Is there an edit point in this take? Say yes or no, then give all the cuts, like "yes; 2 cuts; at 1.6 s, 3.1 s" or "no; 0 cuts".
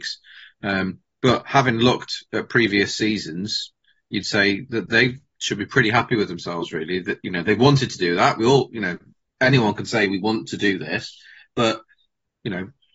no; 0 cuts